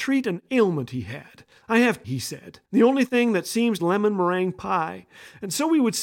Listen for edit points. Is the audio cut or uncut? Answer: cut